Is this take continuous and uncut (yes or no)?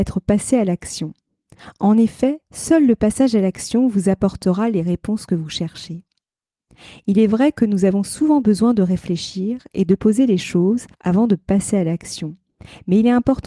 no